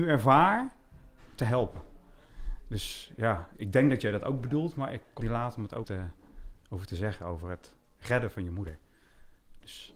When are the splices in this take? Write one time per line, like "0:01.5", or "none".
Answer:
0:03.5
0:05.2
0:05.8